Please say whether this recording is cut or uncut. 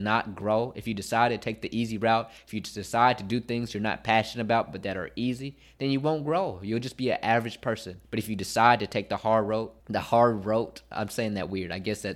cut